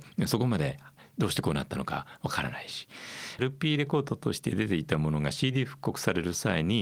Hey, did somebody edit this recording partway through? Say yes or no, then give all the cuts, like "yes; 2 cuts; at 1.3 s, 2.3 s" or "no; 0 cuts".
yes; 1 cut; at 3.4 s